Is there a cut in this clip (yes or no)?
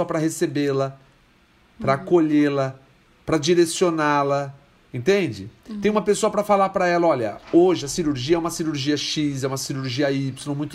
no